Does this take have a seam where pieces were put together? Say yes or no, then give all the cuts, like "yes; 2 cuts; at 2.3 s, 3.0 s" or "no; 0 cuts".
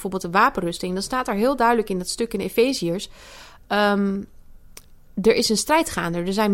no; 0 cuts